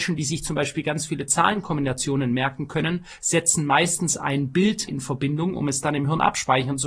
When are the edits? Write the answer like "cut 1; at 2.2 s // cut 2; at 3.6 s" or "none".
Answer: cut 1; at 4.9 s

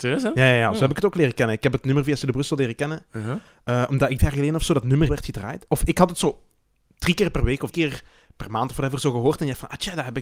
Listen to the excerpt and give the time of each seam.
cut 1; at 4.2 s // cut 2; at 5.1 s // cut 3; at 7.7 s

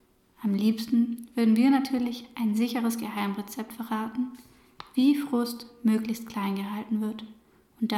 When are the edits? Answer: none

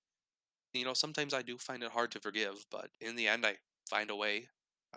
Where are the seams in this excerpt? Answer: cut 1; at 2.9 s

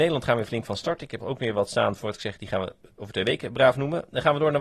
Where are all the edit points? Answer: cut 1; at 1.2 s

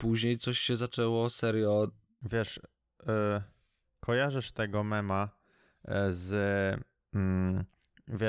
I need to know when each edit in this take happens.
none

